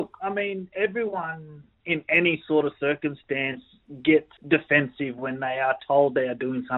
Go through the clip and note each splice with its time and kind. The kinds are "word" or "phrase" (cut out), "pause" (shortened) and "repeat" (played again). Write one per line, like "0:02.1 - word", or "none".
0:04.4 - pause